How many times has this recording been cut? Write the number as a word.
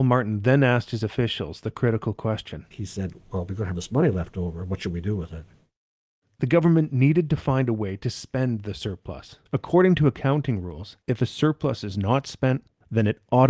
two